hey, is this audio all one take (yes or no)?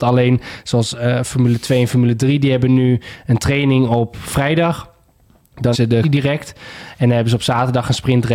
no